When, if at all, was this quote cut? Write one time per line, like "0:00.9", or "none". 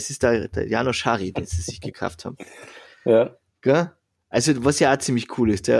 none